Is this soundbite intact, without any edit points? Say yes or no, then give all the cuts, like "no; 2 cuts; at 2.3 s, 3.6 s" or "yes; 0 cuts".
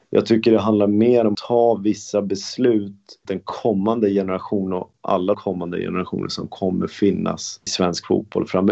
no; 4 cuts; at 1.3 s, 3.3 s, 5.3 s, 7.7 s